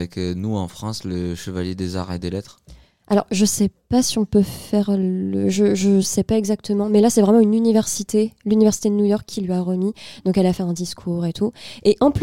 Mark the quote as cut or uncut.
uncut